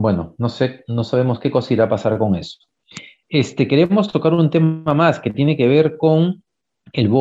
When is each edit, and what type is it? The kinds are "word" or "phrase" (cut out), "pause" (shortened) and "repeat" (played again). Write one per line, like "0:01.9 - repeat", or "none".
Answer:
none